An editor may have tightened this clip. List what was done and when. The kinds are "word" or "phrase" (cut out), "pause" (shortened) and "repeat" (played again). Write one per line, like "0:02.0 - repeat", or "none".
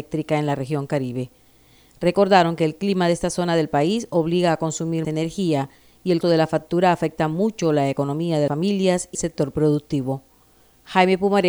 0:05.0 - word
0:06.2 - word
0:08.5 - word
0:09.1 - word